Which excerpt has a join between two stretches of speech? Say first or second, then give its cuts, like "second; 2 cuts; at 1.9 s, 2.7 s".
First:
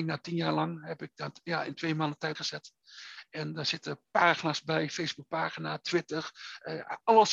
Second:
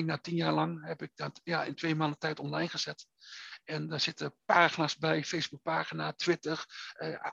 first; 1 cut; at 2.3 s